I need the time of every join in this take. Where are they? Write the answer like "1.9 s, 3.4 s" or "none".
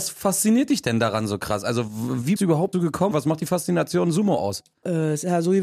2.4 s, 2.7 s, 3.1 s